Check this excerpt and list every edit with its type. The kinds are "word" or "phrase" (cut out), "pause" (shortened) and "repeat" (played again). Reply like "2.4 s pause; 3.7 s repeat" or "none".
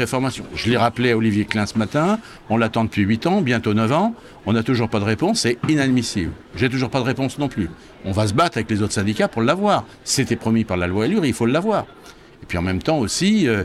none

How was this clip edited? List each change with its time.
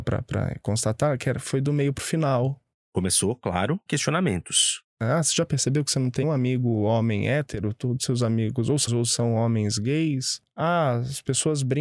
3.9 s word; 6.2 s word; 8.9 s word

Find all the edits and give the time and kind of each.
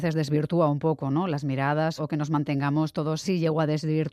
2.0 s word; 3.2 s phrase

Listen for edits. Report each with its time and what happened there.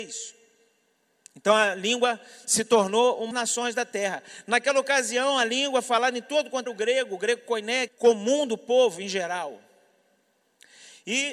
3.3 s phrase; 6.7 s phrase; 7.9 s phrase

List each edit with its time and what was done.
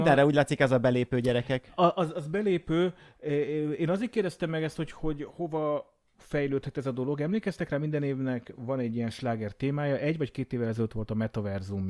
none

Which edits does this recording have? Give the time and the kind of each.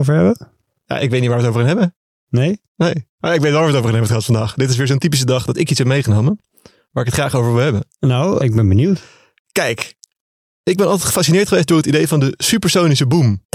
8.4 s word

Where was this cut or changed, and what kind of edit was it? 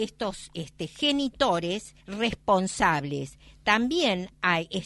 2.0 s pause

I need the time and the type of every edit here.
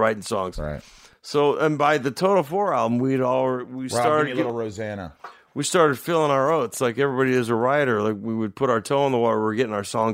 none

